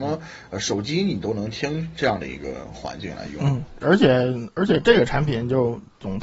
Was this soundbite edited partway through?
yes; 1 cut; at 3.8 s

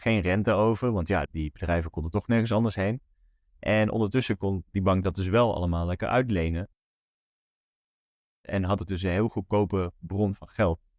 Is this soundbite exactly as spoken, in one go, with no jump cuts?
no; 1 cut; at 1.3 s

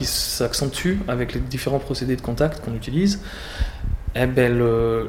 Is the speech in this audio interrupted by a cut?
no; 0 cuts

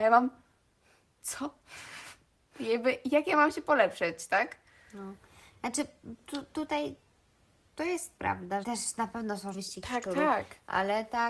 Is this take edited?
yes; 2 cuts; at 8.6 s, 9.5 s

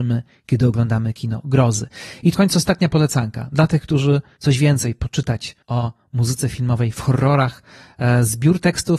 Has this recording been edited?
yes; 3 cuts; at 2.3 s, 4.4 s, 5.6 s

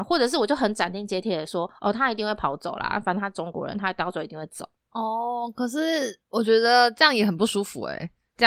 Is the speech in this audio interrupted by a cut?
no; 0 cuts

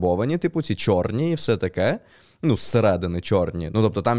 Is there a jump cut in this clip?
no; 0 cuts

